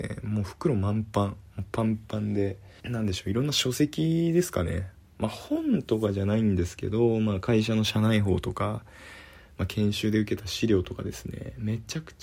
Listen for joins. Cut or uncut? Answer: cut